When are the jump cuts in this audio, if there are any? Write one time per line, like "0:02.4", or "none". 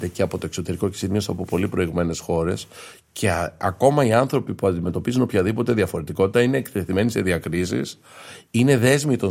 none

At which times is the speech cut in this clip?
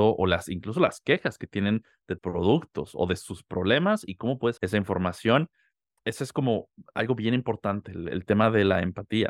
0:02.2
0:04.6

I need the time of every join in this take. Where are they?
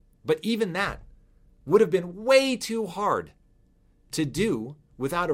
none

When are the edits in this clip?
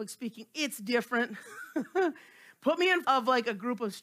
0:03.0

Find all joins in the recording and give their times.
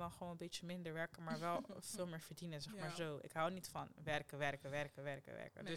none

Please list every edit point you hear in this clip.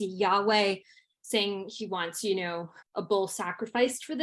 0:02.8

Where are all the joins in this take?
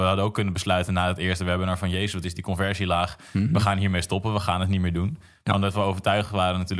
none

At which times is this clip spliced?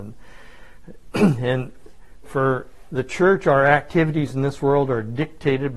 0:02.2

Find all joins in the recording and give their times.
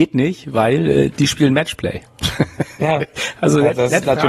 none

